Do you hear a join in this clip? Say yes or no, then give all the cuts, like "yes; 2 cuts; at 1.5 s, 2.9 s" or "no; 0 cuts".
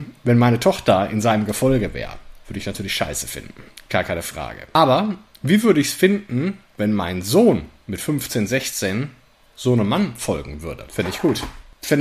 no; 0 cuts